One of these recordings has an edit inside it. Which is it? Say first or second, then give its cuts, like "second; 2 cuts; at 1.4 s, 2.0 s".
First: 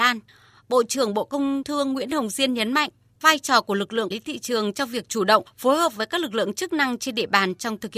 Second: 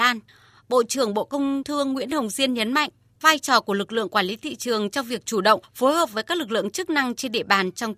first; 1 cut; at 4.1 s